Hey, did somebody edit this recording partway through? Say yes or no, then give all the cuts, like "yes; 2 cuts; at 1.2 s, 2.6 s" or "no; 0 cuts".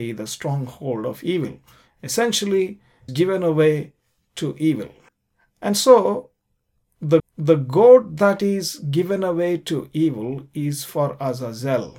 yes; 3 cuts; at 3.1 s, 5.1 s, 7.2 s